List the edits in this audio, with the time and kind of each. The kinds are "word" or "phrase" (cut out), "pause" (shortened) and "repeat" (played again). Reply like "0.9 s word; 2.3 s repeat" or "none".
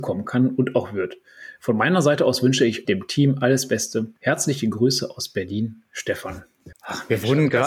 2.8 s word; 4.2 s pause; 6.7 s pause